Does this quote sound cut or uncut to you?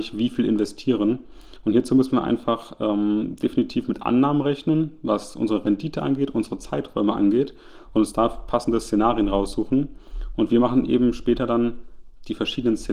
uncut